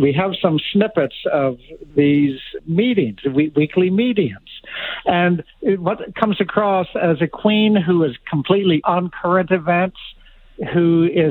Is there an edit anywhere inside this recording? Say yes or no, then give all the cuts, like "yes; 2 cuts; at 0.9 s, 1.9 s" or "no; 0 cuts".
yes; 3 cuts; at 1.9 s, 2.6 s, 8.8 s